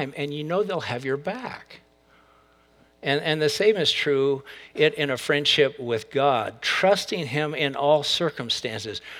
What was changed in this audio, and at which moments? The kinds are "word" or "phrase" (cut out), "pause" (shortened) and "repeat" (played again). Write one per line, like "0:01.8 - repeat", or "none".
none

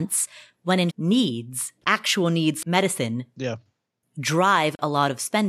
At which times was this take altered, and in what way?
0:00.9 - word
0:01.8 - word
0:02.6 - word

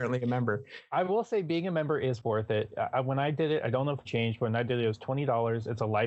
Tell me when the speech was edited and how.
0:04.0 - phrase

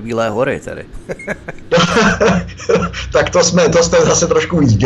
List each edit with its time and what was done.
none

